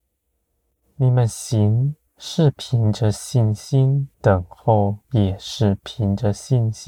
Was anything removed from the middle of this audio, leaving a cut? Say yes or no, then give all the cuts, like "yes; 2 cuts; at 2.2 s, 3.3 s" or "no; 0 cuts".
yes; 3 cuts; at 2.1 s, 4.1 s, 5.0 s